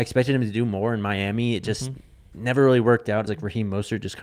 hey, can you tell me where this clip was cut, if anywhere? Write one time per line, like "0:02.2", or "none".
0:03.3